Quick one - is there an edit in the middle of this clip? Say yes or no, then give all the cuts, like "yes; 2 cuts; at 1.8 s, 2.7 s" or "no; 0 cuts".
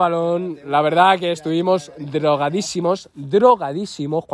no; 0 cuts